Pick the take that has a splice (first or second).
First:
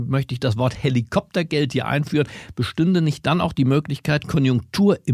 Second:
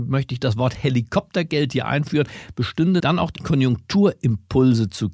second